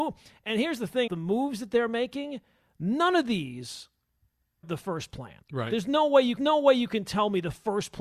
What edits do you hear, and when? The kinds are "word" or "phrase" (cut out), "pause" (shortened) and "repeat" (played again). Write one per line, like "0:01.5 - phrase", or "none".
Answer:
0:01.1 - word
0:04.6 - word
0:05.4 - pause
0:06.4 - repeat